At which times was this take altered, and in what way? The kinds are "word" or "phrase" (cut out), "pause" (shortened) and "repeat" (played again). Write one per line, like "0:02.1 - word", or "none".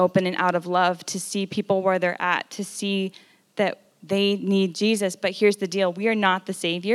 none